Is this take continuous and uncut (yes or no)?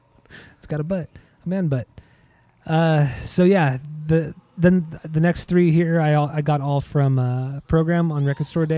yes